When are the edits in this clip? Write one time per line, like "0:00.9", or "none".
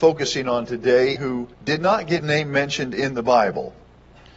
0:01.2
0:01.5
0:02.2